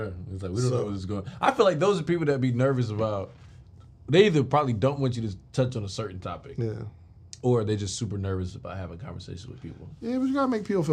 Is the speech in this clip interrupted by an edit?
no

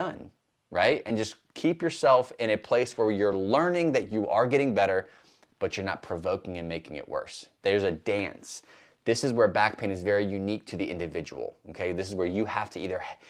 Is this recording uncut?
yes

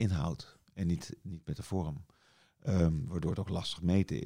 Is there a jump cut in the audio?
no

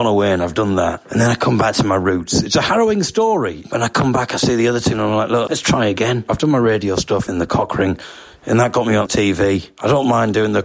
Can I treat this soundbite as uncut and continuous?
no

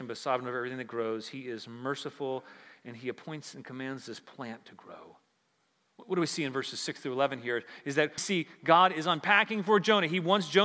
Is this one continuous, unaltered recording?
no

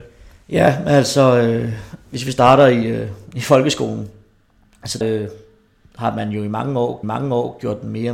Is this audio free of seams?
no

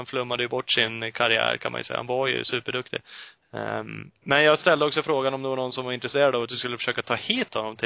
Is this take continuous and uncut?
yes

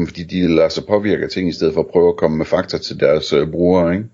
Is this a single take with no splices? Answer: yes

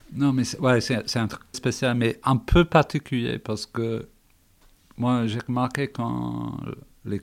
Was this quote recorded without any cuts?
no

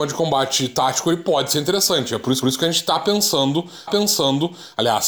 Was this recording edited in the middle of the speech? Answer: yes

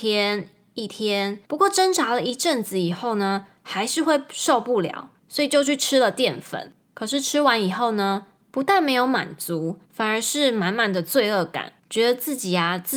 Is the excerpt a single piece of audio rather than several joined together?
no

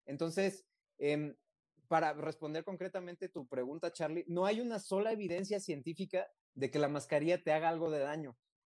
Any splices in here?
no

